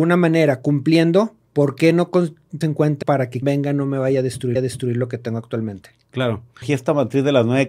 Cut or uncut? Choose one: cut